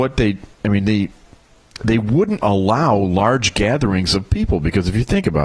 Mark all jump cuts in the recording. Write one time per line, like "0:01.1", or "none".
0:02.4